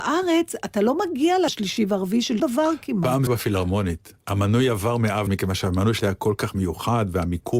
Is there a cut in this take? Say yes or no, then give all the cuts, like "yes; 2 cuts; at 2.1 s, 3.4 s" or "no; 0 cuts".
yes; 5 cuts; at 1.5 s, 2.4 s, 3.3 s, 5.3 s, 6.0 s